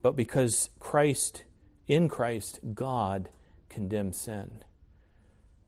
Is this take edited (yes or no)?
no